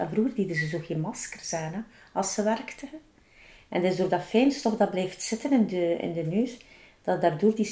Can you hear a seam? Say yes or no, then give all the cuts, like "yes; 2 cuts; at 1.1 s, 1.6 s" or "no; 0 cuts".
no; 0 cuts